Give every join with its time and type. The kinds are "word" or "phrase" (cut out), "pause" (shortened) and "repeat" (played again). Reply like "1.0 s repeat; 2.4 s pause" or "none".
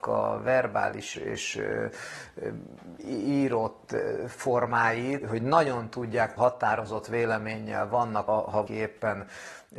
1.1 s word; 5.2 s word; 6.4 s word; 8.3 s word; 8.7 s word